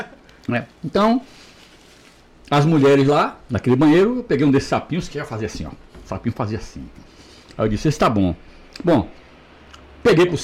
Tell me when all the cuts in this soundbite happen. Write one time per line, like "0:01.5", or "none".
none